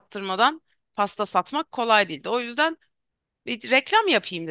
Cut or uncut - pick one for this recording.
uncut